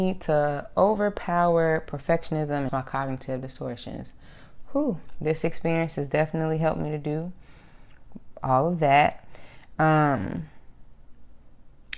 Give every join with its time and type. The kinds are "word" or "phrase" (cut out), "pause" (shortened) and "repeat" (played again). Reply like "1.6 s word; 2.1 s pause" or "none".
2.7 s phrase